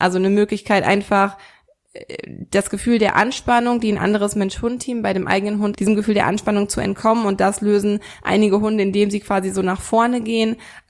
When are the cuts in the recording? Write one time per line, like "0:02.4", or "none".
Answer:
0:05.7